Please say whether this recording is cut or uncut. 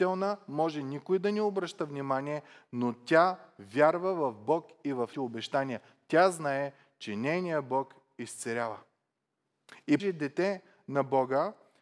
cut